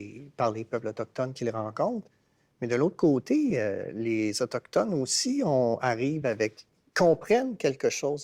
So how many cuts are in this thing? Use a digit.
0